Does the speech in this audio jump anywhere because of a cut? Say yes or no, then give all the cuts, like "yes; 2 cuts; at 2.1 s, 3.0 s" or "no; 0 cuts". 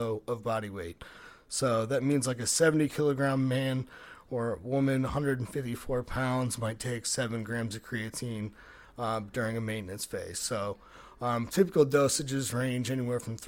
no; 0 cuts